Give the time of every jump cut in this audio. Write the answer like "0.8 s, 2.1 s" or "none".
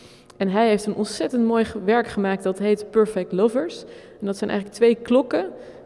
none